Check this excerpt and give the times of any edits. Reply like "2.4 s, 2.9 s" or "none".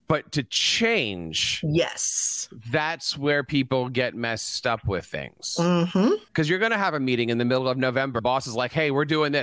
6.3 s, 8.2 s